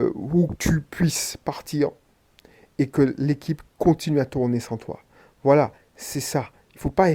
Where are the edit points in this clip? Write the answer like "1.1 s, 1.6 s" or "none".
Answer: none